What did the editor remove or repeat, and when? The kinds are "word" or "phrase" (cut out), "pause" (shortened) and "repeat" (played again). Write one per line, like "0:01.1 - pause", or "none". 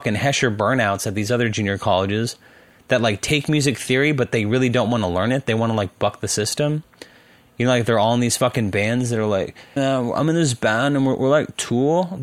0:09.8 - word